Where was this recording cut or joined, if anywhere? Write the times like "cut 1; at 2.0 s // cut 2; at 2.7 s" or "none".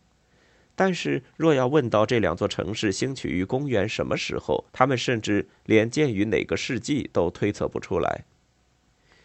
cut 1; at 4.7 s

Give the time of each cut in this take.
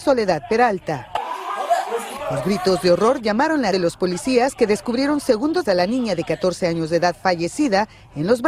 cut 1; at 3.7 s // cut 2; at 5.6 s

